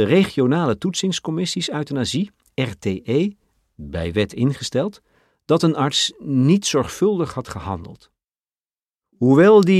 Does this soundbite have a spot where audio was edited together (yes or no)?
no